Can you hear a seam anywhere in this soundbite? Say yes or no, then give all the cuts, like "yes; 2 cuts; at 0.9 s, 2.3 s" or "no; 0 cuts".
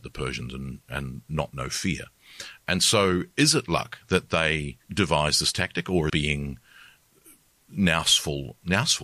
yes; 2 cuts; at 4.8 s, 6.1 s